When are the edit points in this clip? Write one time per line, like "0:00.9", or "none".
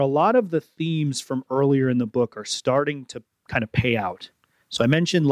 none